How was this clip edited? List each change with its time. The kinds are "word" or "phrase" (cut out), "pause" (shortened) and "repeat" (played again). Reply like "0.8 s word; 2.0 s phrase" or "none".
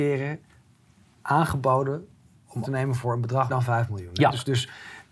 2.6 s word; 3.5 s word